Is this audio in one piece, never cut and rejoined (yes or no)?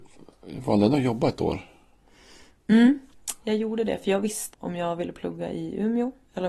no